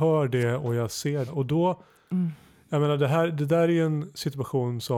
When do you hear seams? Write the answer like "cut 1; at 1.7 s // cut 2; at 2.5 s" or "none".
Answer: cut 1; at 1.3 s